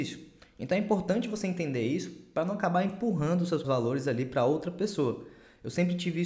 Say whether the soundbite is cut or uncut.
cut